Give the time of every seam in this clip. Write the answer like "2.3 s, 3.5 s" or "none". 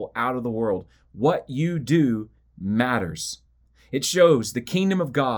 none